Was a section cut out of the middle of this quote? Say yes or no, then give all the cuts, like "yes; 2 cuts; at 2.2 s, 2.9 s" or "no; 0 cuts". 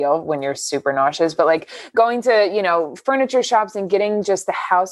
no; 0 cuts